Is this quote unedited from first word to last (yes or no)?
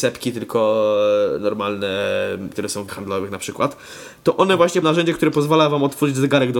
no